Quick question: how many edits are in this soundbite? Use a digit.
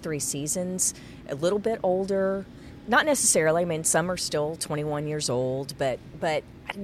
0